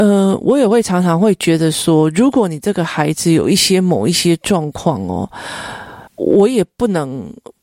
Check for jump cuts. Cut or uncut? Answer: cut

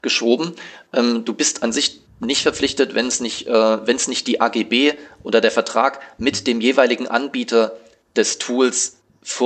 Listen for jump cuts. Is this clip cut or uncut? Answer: uncut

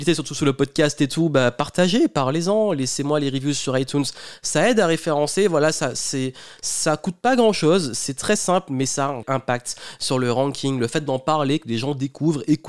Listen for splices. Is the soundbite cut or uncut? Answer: cut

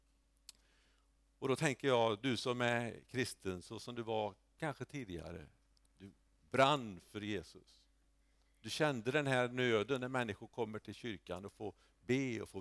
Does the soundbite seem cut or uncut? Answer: uncut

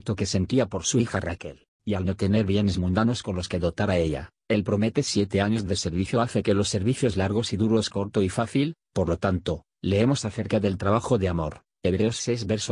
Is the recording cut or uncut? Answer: cut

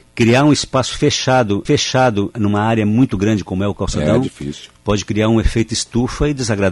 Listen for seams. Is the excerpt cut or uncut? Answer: cut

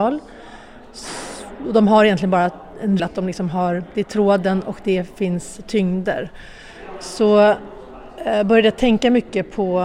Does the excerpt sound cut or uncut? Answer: cut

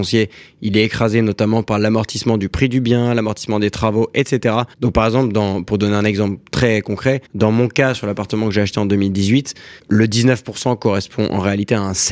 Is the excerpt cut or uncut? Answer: cut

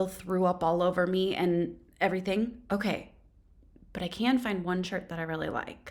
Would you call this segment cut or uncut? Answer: uncut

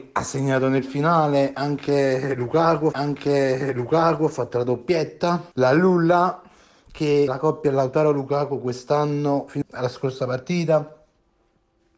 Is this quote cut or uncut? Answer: cut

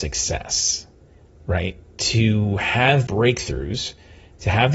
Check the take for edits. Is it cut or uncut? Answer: cut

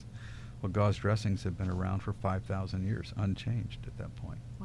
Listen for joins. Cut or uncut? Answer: uncut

